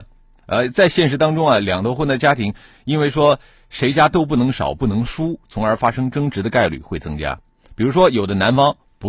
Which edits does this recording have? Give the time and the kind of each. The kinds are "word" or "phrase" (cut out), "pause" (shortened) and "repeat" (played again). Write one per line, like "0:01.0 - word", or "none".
none